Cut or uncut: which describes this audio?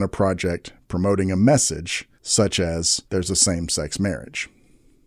cut